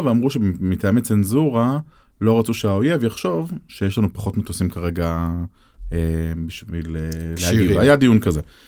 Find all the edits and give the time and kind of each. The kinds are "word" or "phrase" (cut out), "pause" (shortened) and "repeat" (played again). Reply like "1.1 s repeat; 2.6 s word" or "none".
none